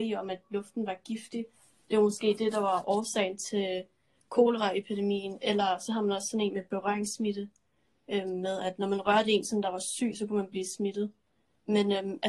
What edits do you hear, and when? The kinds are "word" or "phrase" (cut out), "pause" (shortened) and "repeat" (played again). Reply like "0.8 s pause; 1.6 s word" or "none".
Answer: none